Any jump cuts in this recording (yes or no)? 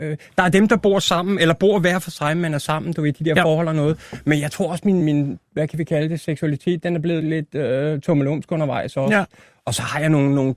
yes